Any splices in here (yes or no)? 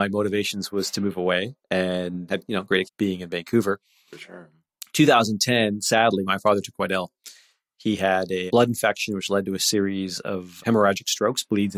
yes